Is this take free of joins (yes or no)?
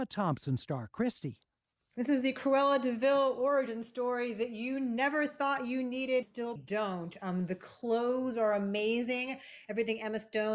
no